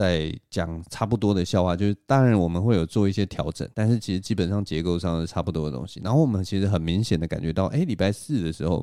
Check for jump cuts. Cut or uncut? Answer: cut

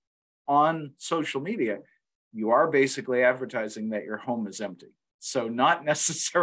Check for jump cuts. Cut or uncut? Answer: uncut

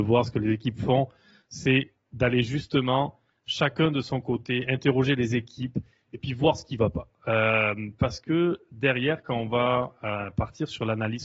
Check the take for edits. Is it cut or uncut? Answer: uncut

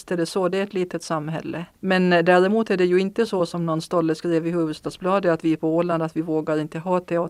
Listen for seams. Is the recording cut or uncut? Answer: cut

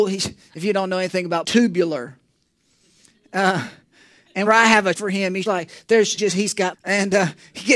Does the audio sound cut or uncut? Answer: cut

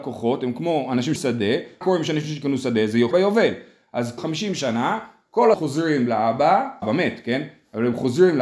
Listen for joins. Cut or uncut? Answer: cut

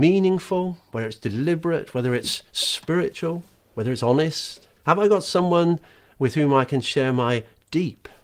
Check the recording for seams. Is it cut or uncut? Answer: cut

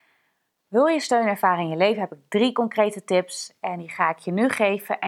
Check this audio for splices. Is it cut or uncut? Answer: uncut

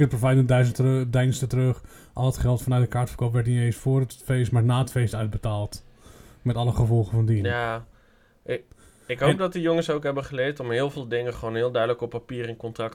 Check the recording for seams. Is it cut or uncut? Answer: uncut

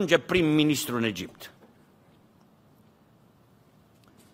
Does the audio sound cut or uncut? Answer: uncut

